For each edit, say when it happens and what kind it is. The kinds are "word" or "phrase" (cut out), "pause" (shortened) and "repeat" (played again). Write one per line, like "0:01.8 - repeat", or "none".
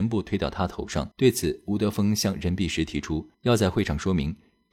0:01.1 - pause
0:03.3 - pause